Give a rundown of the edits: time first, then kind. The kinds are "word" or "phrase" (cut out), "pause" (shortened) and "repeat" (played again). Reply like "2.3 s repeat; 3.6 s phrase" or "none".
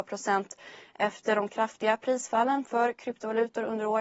none